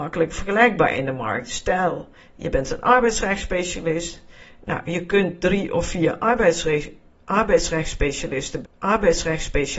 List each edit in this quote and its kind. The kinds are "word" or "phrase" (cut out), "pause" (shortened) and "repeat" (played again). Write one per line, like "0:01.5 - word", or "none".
0:08.6 - repeat